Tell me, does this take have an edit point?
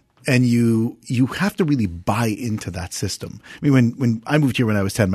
no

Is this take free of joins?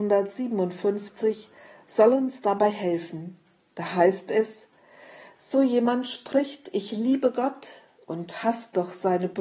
yes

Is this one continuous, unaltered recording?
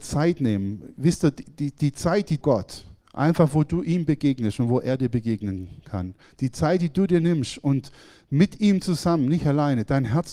no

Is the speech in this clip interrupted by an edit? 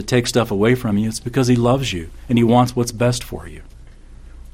no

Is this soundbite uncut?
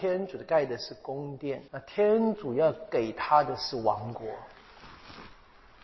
no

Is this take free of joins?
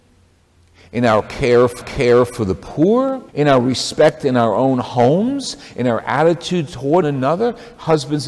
no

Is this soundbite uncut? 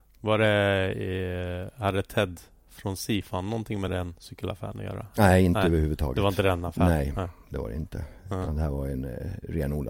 yes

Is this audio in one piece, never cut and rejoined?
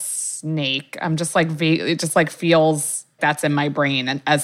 no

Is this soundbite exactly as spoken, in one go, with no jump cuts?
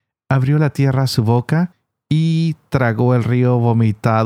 yes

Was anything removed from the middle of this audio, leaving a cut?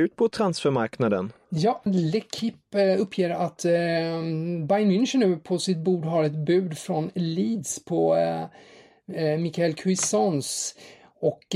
yes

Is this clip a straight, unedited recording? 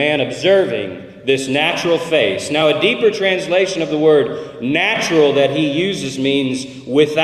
yes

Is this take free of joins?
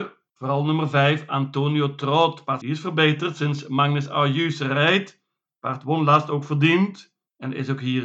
no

